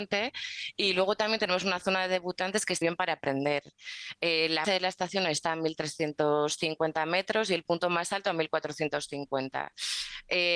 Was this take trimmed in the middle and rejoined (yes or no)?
yes